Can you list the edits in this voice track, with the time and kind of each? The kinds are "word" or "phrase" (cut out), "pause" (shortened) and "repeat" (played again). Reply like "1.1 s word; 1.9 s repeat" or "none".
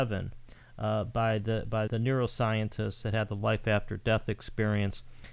1.9 s word; 3.0 s phrase